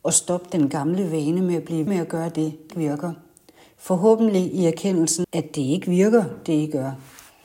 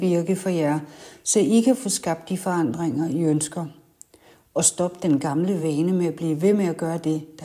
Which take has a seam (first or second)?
first